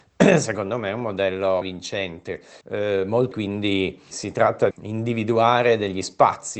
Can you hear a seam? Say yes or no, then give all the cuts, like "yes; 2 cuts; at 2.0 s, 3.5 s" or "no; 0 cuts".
yes; 5 cuts; at 1.6 s, 2.6 s, 3.3 s, 4.1 s, 4.7 s